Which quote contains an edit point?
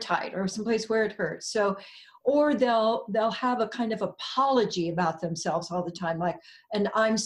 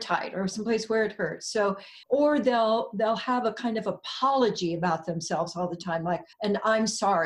second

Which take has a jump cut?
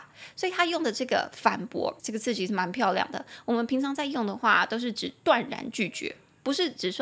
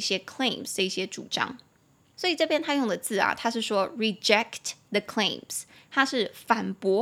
first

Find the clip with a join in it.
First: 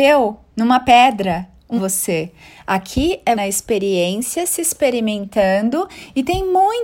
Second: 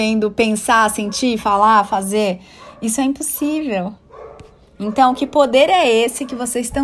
first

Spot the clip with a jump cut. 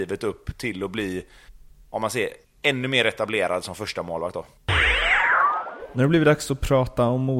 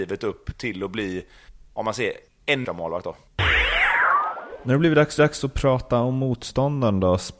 second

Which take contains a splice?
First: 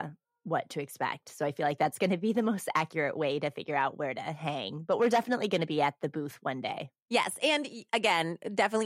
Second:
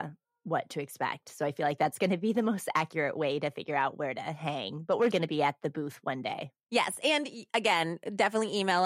second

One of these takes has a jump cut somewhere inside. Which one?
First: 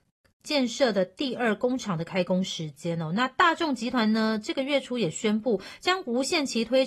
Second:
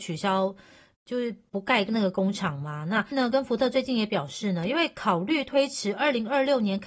second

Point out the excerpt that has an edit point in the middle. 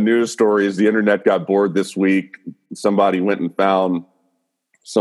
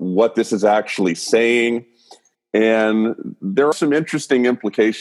second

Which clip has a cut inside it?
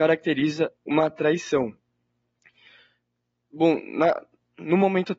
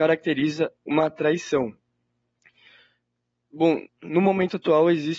second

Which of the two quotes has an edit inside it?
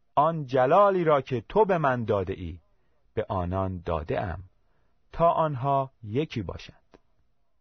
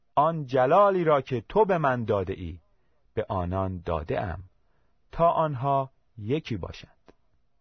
first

